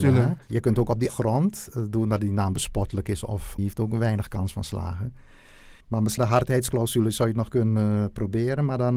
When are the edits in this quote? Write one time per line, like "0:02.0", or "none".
0:01.1
0:03.6
0:05.8
0:06.2